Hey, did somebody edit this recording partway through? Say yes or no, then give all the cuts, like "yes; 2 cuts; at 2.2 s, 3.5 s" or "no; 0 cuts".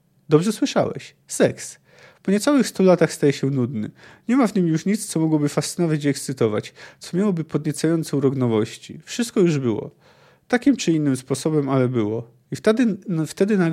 no; 0 cuts